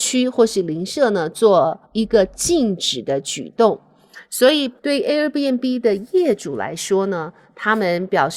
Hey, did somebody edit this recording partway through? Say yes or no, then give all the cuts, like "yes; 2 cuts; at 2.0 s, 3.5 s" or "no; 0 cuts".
yes; 2 cuts; at 1.9 s, 4.8 s